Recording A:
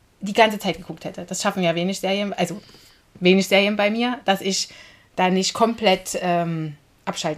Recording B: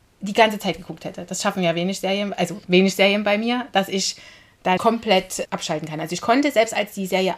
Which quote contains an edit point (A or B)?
B